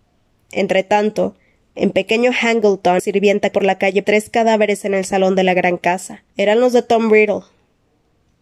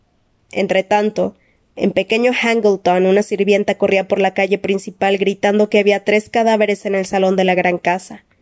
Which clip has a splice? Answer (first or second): first